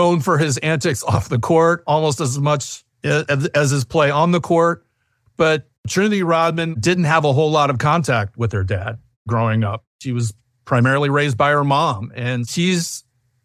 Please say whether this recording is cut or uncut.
cut